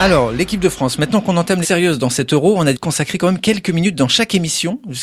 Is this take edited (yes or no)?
yes